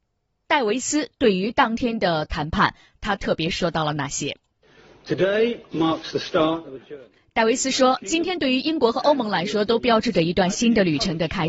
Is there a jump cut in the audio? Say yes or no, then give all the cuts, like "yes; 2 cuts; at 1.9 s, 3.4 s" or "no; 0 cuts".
no; 0 cuts